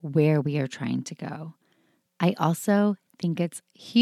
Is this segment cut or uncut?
uncut